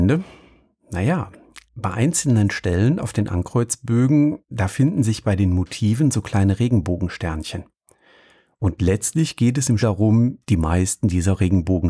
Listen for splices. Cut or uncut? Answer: cut